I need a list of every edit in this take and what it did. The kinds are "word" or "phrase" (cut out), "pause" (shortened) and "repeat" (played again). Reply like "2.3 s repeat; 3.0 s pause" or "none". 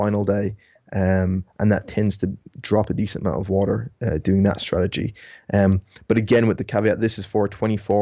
none